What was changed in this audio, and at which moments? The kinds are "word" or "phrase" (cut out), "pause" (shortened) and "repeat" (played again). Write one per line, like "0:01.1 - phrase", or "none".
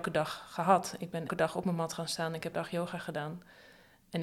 0:01.3 - word
0:02.5 - word